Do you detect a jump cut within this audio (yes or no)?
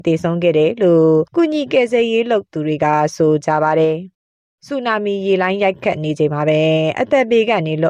yes